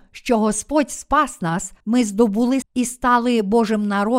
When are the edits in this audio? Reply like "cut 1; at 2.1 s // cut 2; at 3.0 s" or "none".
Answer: cut 1; at 1.8 s // cut 2; at 2.6 s